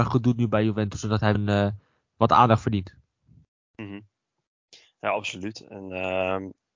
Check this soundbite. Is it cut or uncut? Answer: cut